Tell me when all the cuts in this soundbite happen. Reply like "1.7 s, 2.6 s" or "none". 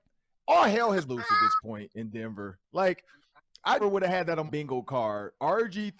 1.1 s, 3.8 s, 4.5 s